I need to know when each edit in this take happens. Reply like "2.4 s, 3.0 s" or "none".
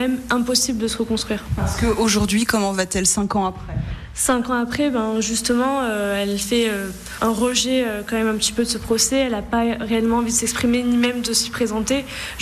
none